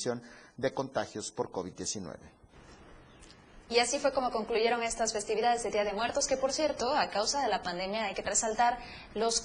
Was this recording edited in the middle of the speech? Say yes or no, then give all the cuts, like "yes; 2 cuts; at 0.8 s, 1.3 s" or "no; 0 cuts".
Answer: yes; 1 cut; at 8.2 s